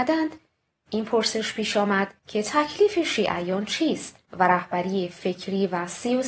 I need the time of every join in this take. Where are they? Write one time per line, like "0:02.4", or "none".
0:02.2
0:04.3

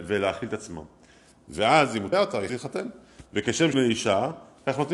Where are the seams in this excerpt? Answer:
0:02.1
0:02.5
0:03.7

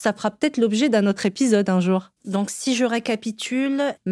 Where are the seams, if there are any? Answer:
0:02.2

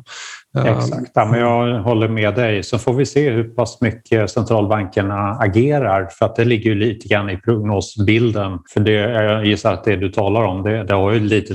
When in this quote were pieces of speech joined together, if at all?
0:08.6

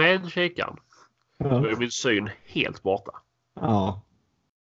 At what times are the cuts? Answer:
none

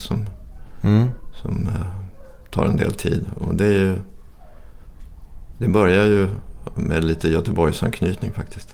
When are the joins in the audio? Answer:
none

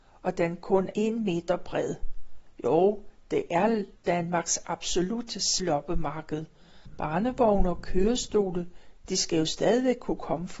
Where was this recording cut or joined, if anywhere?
0:00.9
0:04.0
0:05.6

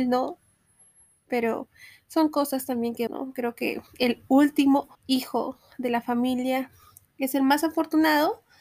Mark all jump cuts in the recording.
0:03.1
0:03.9
0:04.9

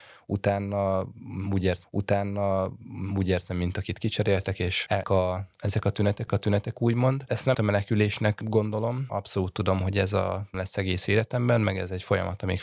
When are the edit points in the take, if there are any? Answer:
0:01.8
0:05.0
0:05.5
0:06.3
0:07.5
0:09.1
0:10.5

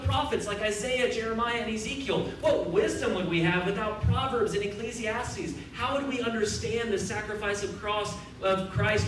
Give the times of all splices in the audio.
none

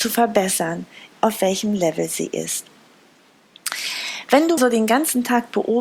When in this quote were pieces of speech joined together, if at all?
0:01.1
0:04.6

